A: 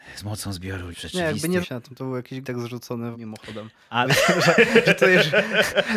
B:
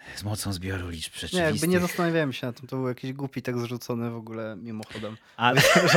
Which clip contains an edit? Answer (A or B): A